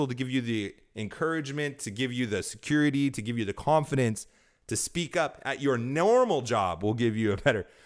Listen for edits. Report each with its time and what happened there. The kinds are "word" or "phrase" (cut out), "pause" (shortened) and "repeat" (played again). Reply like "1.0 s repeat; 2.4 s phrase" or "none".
none